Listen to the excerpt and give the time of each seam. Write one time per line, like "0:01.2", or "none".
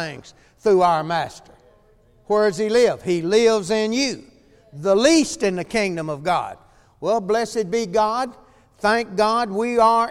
none